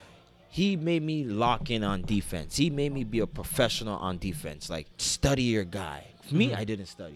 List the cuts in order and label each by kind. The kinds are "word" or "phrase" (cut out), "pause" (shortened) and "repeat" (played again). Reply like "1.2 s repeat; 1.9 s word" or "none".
4.9 s pause